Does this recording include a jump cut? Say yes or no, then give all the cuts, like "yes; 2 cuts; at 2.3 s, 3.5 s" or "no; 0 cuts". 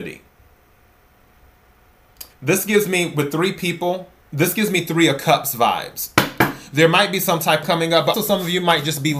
yes; 4 cuts; at 2.3 s, 4.2 s, 7.6 s, 8.1 s